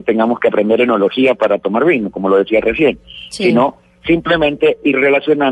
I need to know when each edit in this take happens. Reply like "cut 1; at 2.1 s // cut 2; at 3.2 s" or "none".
none